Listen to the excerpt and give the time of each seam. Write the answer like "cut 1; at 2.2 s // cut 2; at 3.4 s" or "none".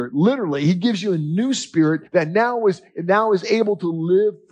cut 1; at 2.1 s